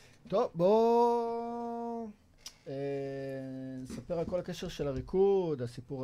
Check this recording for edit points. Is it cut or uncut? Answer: uncut